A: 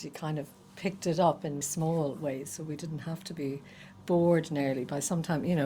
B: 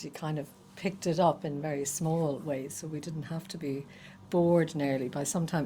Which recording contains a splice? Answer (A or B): A